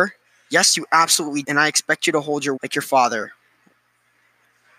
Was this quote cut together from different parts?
yes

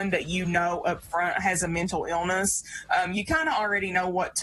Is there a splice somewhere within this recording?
no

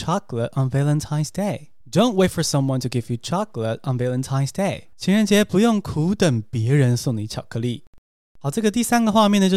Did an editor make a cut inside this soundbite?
yes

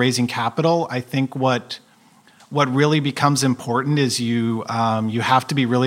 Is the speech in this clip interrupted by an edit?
no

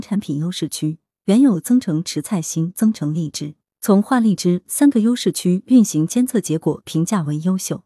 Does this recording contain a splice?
no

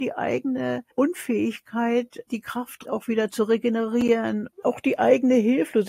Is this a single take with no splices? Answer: no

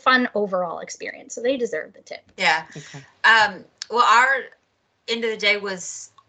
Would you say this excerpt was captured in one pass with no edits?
yes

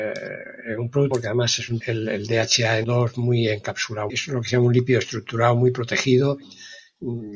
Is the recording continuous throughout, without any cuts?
no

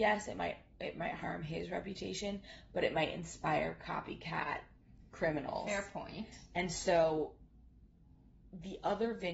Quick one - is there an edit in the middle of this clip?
no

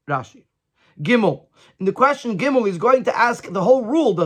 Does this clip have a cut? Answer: no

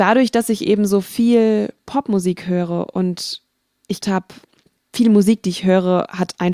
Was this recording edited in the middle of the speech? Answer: yes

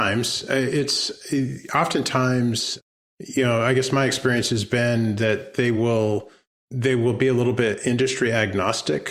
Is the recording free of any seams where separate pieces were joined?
yes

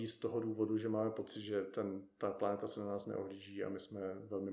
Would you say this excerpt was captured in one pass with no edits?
yes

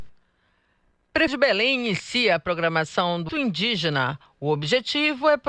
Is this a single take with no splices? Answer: no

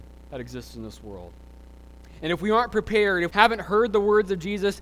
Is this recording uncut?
no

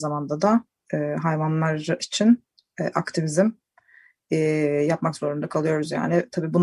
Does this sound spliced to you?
no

